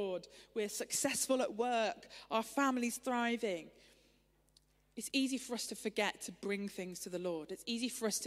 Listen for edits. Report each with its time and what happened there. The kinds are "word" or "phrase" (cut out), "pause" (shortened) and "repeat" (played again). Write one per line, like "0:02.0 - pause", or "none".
none